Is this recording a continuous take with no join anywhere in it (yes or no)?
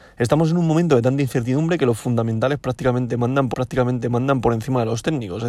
no